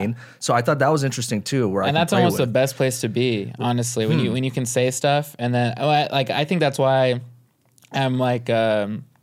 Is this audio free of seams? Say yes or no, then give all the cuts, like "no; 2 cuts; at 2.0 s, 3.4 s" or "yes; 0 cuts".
yes; 0 cuts